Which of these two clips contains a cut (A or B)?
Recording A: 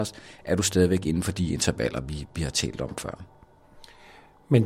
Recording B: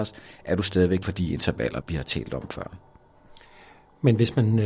B